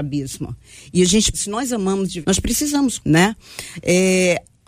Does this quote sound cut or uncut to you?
cut